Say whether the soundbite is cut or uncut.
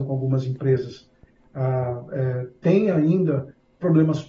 uncut